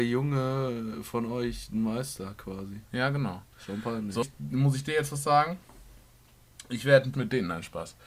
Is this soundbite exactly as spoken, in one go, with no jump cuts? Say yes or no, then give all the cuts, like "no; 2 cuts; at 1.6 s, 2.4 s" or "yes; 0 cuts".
no; 2 cuts; at 4.2 s, 7.1 s